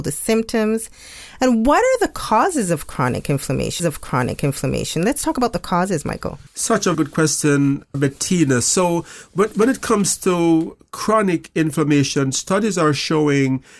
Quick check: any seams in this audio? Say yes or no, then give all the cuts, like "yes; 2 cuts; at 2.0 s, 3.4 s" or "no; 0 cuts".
yes; 4 cuts; at 3.8 s, 6.5 s, 6.9 s, 7.9 s